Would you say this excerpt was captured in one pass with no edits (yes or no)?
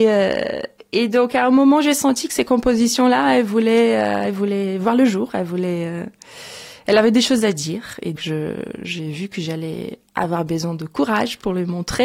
no